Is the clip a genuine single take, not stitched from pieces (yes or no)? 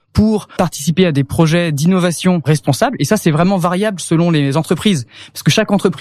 yes